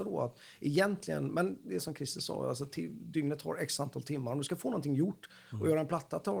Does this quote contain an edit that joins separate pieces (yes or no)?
no